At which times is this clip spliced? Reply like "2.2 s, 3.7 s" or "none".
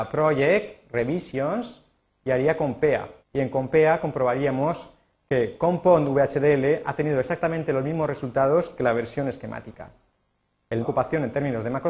3.2 s, 10.8 s